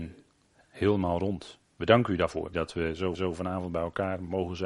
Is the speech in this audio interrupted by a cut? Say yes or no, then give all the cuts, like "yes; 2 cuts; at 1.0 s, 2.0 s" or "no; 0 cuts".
yes; 2 cuts; at 2.5 s, 3.1 s